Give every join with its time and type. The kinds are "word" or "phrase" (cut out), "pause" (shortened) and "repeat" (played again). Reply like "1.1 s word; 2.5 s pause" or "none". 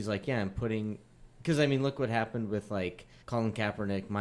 3.2 s pause